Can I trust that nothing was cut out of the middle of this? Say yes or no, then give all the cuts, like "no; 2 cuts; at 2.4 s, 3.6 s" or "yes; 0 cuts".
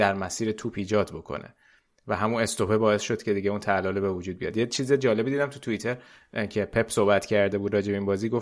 yes; 0 cuts